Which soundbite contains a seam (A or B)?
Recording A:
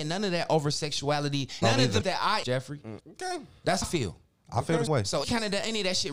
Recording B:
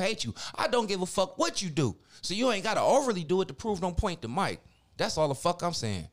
A